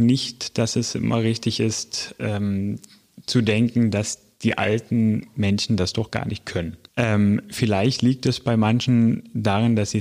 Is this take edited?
no; 0 cuts

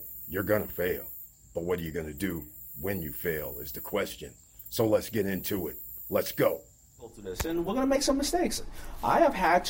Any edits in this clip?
no; 0 cuts

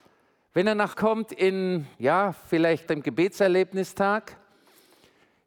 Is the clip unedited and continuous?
no; 3 cuts; at 0.9 s, 1.9 s, 2.9 s

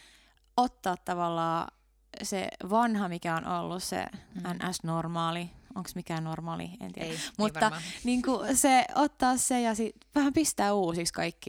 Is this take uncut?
yes; 0 cuts

